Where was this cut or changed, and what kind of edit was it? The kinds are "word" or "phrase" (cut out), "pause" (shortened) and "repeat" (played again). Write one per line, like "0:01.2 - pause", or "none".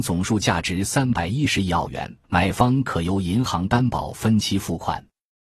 0:02.2 - pause